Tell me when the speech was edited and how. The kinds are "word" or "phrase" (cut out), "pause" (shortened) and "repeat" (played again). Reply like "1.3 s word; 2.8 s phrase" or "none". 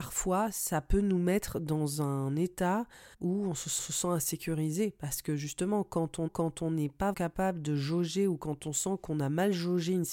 3.1 s pause; 3.8 s repeat; 6.3 s repeat; 7.1 s word